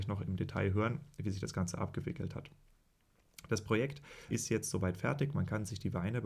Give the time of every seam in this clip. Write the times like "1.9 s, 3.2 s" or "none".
4.3 s